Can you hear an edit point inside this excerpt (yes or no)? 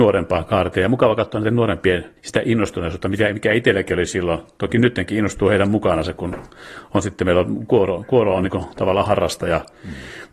yes